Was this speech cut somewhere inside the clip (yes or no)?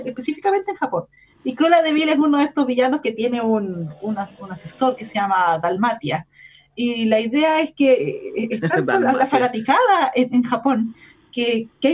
no